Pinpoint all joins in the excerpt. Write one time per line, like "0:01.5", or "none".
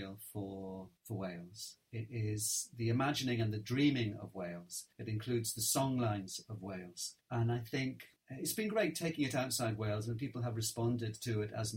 0:01.0
0:04.9
0:07.2